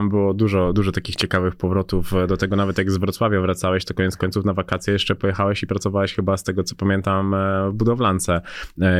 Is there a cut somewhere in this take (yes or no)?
no